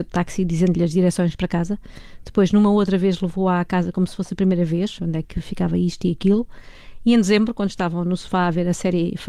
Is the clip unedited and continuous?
no; 1 cut; at 5.0 s

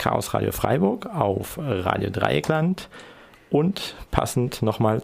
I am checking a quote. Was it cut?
no; 0 cuts

